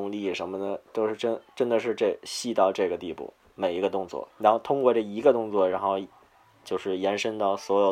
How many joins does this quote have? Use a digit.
1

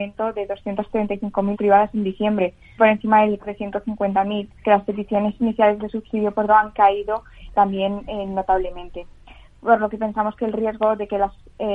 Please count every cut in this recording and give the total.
6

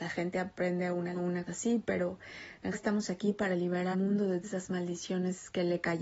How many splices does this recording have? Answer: 5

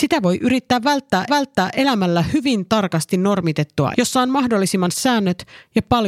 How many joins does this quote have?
3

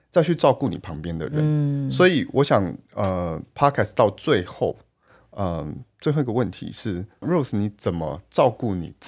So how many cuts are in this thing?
1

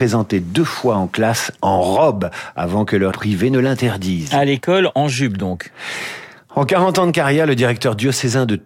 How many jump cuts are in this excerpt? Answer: 1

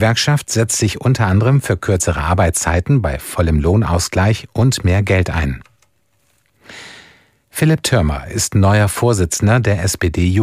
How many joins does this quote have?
0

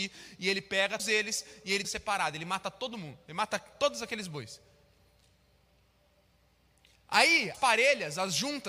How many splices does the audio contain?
3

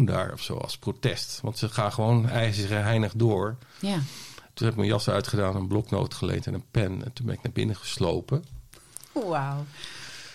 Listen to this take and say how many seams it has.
0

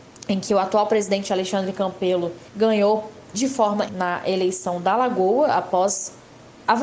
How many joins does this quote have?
2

